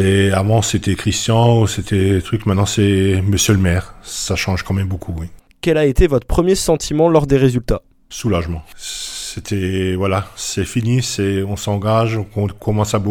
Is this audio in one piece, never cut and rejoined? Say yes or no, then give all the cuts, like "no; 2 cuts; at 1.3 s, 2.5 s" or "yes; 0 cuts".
yes; 0 cuts